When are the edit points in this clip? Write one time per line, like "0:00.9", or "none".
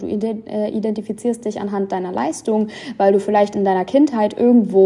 none

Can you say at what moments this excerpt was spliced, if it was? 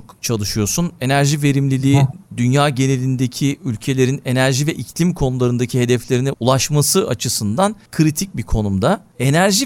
0:06.3

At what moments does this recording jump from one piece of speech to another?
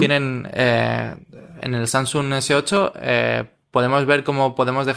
none

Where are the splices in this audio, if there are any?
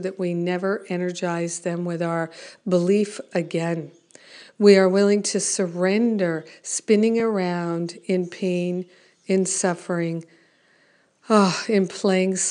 none

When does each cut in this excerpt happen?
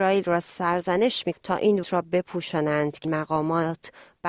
0:01.3
0:01.8
0:03.0

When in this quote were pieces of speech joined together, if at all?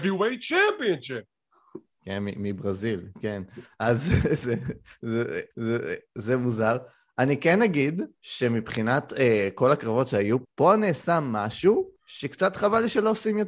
0:05.5
0:08.1
0:10.4
0:12.0

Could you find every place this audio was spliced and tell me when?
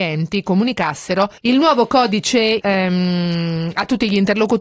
0:01.4
0:02.6

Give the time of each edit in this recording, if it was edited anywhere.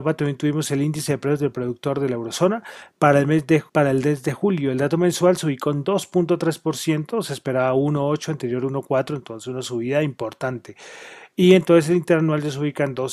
0:03.7

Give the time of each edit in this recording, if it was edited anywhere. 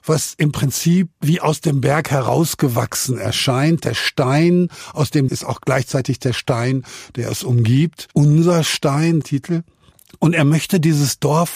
0:01.1
0:05.3
0:08.1
0:09.2

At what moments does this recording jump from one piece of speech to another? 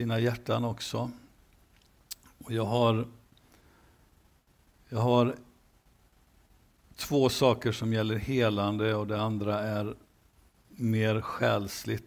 none

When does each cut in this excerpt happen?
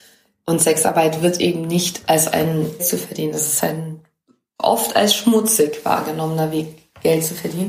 0:02.8
0:04.3

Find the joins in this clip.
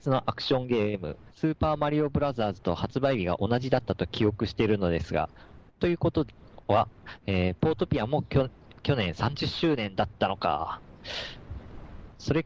0:01.3

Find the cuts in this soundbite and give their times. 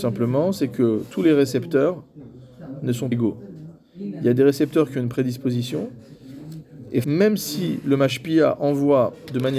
0:03.1
0:07.0

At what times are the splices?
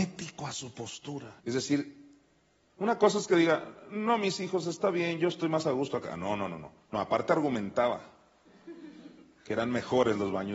0:01.4
0:02.5
0:06.8

